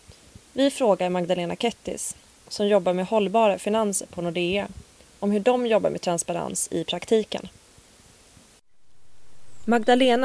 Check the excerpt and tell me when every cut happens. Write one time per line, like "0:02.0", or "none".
none